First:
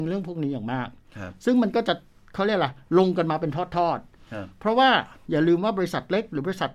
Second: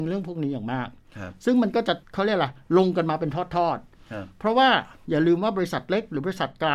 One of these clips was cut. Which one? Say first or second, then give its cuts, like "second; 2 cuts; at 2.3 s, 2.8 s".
second; 1 cut; at 2.0 s